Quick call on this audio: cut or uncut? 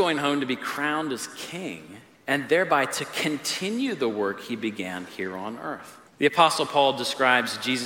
cut